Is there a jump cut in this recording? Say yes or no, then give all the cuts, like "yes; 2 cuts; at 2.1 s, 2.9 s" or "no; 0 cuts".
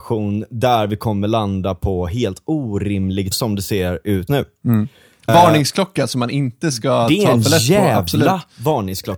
yes; 3 cuts; at 3.3 s, 4.3 s, 5.3 s